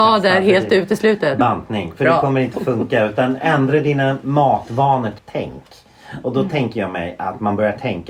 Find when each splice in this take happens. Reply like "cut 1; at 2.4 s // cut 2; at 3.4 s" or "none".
cut 1; at 5.2 s